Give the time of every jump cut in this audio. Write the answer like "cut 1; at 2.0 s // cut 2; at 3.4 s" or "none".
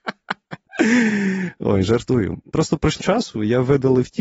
cut 1; at 3.0 s